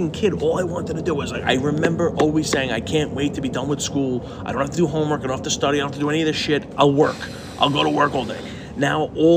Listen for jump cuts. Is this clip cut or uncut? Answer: uncut